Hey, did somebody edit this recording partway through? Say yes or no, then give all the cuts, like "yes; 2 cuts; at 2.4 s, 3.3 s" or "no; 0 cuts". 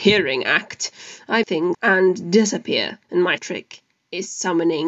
yes; 4 cuts; at 1.4 s, 1.7 s, 3.0 s, 3.4 s